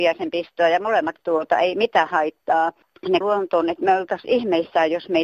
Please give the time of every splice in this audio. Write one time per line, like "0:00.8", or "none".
0:01.2
0:03.2